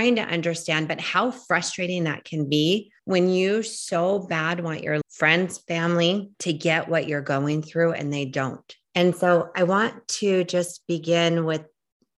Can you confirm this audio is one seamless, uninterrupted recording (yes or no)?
no